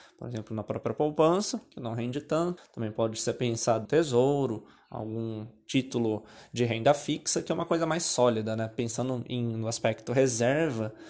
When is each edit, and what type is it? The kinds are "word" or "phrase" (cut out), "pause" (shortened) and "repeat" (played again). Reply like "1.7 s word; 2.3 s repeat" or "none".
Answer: 2.6 s word; 3.8 s word